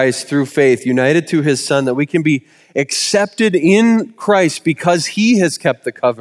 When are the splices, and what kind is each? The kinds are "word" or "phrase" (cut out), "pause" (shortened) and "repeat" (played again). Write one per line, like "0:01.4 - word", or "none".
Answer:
none